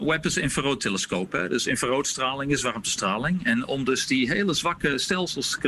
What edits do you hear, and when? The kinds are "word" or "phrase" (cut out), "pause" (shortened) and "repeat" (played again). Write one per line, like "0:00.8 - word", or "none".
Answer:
none